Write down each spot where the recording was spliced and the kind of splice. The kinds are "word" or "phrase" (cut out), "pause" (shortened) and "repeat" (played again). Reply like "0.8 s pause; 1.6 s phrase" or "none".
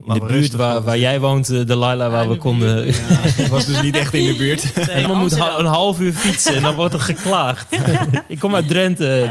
5.1 s word

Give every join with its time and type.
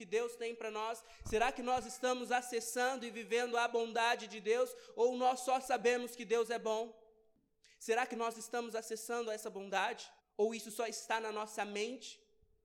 10.2 s pause

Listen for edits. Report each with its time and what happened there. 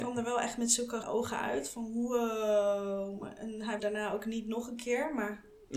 1.0 s word; 3.8 s word

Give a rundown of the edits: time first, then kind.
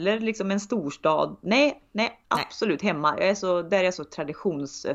2.2 s pause

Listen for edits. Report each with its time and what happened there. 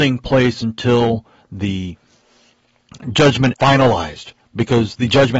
3.5 s word

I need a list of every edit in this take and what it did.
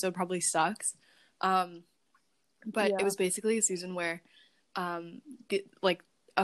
none

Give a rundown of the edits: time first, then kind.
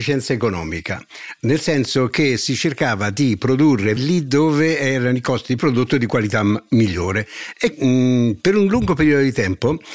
4.0 s word; 5.6 s phrase; 7.7 s word

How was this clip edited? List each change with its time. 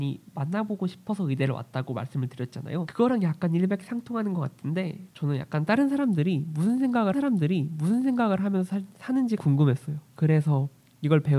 5.1 s pause; 7.1 s repeat; 9.4 s word

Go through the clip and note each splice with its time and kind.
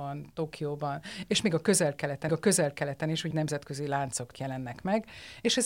2.3 s repeat; 3.3 s word; 4.3 s word

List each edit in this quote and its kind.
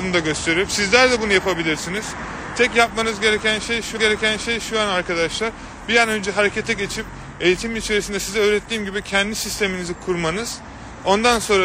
4.0 s repeat

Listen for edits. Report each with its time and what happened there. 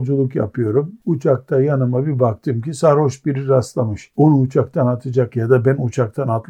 none

